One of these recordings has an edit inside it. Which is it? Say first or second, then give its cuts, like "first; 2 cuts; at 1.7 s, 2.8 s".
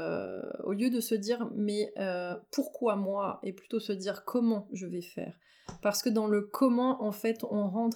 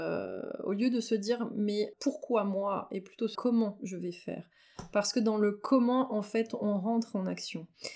second; 2 cuts; at 1.9 s, 3.3 s